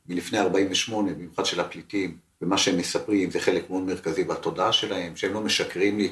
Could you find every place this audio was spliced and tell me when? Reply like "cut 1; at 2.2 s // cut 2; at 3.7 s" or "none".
cut 1; at 2.3 s